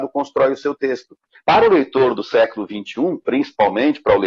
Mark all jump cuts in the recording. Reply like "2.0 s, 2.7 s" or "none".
none